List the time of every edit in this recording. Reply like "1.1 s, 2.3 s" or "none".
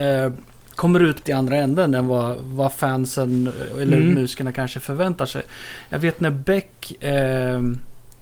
1.2 s